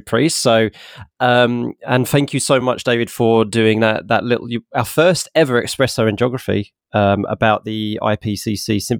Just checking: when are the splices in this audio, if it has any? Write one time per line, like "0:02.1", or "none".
none